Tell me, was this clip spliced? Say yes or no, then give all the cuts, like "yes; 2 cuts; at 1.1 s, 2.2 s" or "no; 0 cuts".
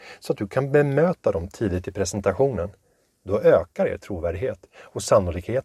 no; 0 cuts